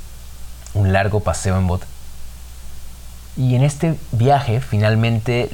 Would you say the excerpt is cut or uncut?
uncut